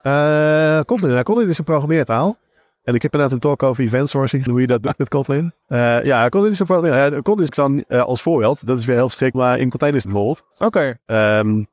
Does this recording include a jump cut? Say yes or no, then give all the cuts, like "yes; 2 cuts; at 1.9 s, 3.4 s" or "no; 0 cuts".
yes; 6 cuts; at 4.5 s, 5.6 s, 7.5 s, 9.3 s, 10.0 s, 10.5 s